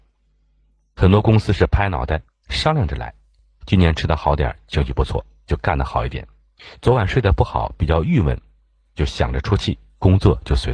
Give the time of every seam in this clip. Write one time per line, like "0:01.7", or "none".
none